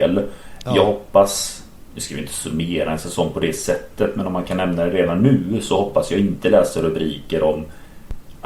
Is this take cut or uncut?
uncut